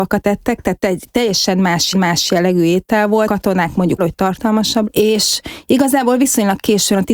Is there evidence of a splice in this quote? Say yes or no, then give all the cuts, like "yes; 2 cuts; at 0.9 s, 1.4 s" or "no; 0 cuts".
yes; 4 cuts; at 1.9 s, 3.3 s, 4.0 s, 4.8 s